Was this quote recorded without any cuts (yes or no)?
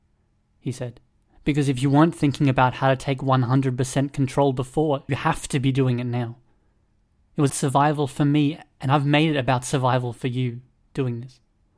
no